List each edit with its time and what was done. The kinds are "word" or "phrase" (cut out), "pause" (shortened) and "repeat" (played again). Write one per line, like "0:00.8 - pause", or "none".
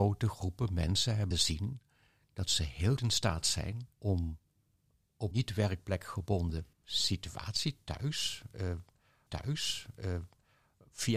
0:01.3 - word
0:03.0 - word
0:03.9 - pause
0:05.3 - word
0:06.7 - pause
0:09.3 - repeat